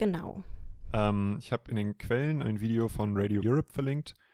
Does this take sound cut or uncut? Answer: cut